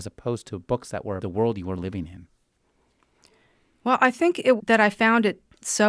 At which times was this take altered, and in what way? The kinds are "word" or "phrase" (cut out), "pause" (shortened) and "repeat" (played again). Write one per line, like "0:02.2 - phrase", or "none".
0:01.2 - word
0:04.6 - word